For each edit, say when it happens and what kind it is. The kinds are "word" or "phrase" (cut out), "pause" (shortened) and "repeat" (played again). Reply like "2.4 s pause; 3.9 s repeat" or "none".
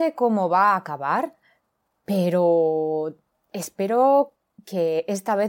none